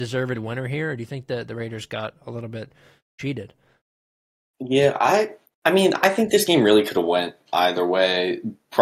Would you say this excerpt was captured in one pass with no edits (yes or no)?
yes